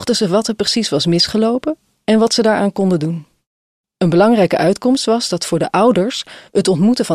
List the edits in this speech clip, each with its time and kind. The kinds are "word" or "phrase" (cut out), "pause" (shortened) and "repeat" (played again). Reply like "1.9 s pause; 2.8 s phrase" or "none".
none